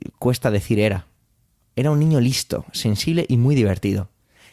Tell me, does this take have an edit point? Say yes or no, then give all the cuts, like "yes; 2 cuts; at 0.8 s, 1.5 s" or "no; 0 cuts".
no; 0 cuts